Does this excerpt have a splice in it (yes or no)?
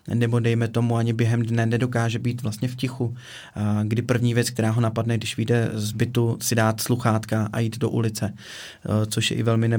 no